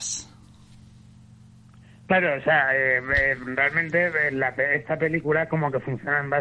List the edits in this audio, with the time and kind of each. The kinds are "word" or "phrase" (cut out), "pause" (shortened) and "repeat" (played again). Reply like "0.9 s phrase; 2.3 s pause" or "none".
none